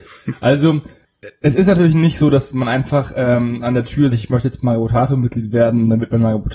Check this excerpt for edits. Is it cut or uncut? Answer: cut